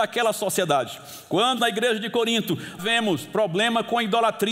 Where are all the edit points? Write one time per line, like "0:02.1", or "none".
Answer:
0:01.6
0:02.8